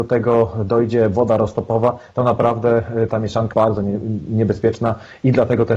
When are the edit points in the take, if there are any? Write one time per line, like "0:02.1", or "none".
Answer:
0:03.5